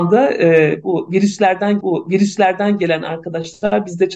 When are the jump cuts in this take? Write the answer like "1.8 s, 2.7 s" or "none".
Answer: 1.8 s